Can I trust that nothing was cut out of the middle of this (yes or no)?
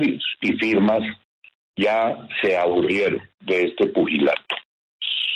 yes